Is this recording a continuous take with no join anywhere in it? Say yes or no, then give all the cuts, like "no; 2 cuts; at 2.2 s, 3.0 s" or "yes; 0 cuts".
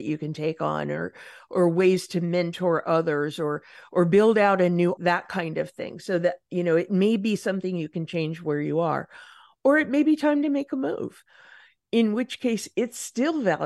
no; 1 cut; at 5.0 s